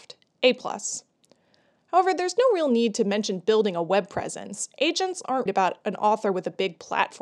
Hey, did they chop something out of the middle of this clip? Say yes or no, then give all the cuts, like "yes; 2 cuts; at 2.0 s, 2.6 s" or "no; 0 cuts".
yes; 1 cut; at 5.5 s